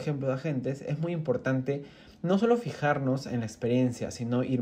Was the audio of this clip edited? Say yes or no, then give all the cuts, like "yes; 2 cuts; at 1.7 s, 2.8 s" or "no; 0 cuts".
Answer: no; 0 cuts